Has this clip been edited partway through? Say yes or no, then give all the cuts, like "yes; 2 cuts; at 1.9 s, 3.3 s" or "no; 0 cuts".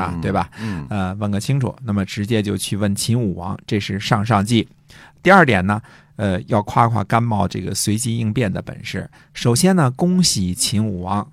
no; 0 cuts